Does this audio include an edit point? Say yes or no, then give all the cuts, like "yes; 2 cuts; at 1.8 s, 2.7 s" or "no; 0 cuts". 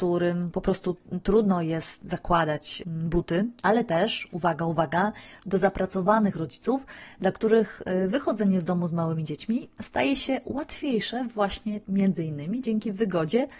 no; 0 cuts